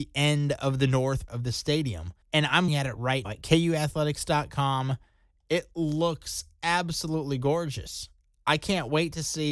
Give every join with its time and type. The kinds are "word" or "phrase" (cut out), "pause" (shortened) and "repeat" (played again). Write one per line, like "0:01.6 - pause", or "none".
0:01.3 - word
0:02.2 - pause
0:02.7 - word
0:03.2 - word